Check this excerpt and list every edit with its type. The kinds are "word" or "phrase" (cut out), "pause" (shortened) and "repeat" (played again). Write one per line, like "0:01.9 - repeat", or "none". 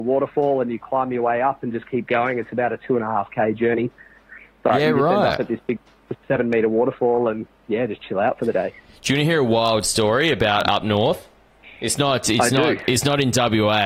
none